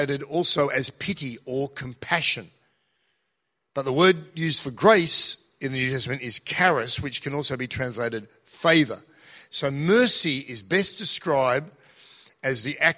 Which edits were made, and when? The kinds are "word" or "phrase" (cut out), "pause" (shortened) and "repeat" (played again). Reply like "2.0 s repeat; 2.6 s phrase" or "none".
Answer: none